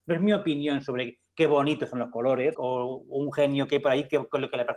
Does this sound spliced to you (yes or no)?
yes